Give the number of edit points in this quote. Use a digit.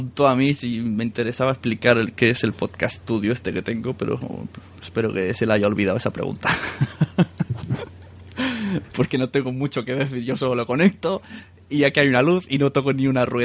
0